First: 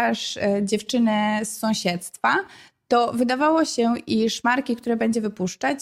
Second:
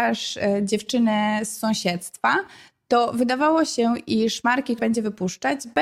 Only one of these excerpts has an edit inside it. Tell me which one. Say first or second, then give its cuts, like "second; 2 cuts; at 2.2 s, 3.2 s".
second; 1 cut; at 4.8 s